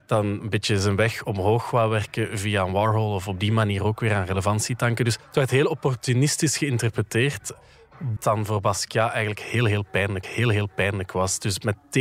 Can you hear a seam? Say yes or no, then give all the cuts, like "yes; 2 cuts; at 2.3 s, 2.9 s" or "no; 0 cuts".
yes; 3 cuts; at 5.2 s, 8.2 s, 10.2 s